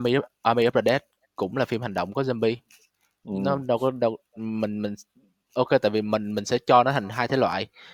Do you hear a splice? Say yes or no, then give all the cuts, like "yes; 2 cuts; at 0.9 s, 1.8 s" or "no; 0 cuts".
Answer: no; 0 cuts